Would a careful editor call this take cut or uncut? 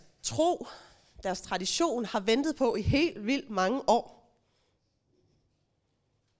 uncut